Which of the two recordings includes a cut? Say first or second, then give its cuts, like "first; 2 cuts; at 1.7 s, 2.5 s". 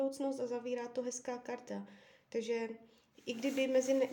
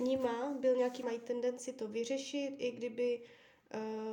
second; 1 cut; at 1.0 s